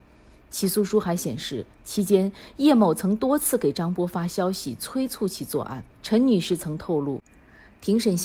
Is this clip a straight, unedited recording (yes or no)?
no